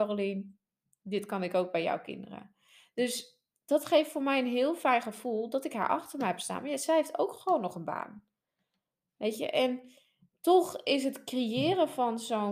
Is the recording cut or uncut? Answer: uncut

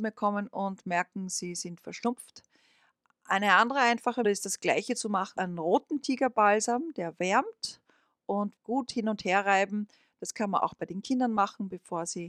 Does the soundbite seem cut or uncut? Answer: cut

